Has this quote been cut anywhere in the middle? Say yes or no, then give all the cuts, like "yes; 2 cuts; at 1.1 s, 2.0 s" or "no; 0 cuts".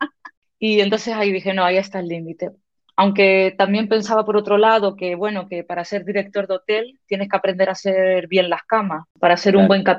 no; 0 cuts